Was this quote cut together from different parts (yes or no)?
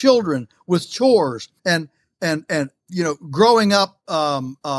yes